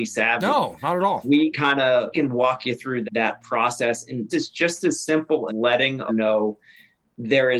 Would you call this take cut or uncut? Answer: cut